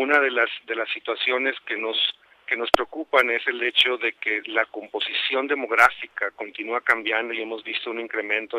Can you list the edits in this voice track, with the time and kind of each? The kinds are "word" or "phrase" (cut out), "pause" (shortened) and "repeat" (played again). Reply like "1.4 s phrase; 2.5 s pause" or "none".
none